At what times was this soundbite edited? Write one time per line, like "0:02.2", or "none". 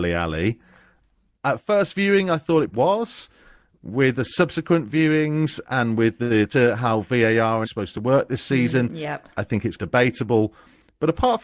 0:02.7
0:06.5
0:07.6
0:09.8